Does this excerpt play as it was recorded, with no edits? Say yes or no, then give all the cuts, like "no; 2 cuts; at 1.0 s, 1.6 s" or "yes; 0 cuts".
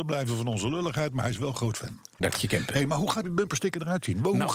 no; 2 cuts; at 2.2 s, 3.2 s